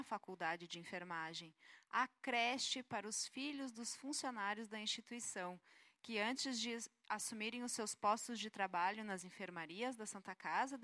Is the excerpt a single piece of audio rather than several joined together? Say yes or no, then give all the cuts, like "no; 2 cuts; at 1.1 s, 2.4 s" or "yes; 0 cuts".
yes; 0 cuts